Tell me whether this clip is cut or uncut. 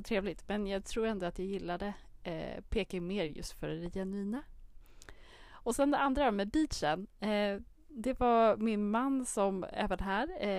uncut